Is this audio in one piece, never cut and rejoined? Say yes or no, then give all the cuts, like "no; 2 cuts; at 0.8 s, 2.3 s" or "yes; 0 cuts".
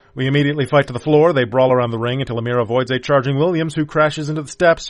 yes; 0 cuts